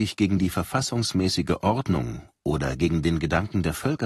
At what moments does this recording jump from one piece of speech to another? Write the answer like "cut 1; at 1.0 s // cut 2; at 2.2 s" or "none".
none